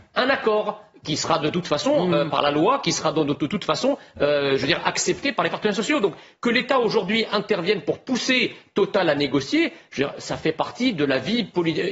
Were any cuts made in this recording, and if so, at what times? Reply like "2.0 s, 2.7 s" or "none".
none

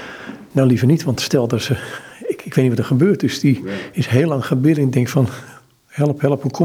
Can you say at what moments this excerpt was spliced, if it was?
none

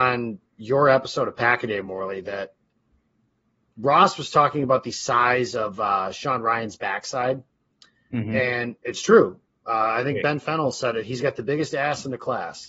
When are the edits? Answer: none

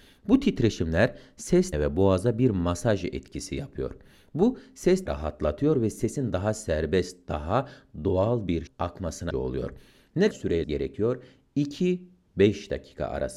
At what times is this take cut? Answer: 1.7 s, 5.1 s, 8.7 s, 9.3 s, 10.3 s, 10.6 s

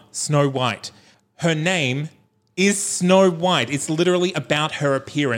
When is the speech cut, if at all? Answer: none

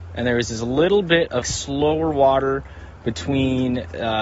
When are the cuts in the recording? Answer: 1.4 s

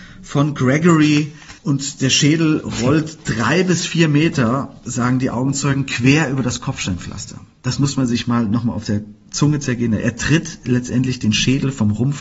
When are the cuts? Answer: 1.6 s

